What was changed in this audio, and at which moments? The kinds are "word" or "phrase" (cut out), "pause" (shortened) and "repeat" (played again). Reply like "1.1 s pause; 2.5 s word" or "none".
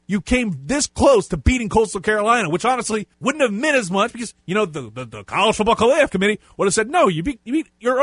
3.1 s pause